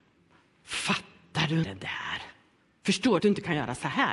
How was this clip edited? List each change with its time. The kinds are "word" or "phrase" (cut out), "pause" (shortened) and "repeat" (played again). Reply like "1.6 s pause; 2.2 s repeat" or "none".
1.6 s word; 3.2 s phrase